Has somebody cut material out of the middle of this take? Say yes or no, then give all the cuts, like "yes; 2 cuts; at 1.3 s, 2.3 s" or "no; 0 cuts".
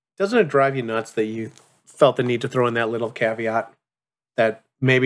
no; 0 cuts